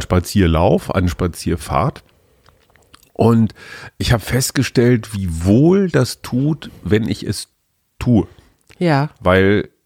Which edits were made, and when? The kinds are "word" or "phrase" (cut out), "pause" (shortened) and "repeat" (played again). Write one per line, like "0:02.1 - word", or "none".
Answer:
none